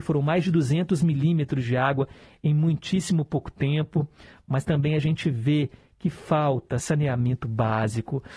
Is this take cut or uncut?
uncut